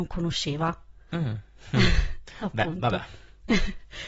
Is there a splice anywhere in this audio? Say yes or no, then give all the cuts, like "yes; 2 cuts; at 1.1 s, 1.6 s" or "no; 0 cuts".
no; 0 cuts